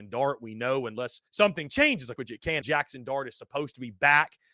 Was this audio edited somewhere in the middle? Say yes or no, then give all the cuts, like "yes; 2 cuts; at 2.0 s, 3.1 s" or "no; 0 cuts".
yes; 3 cuts; at 1.3 s, 2.2 s, 2.6 s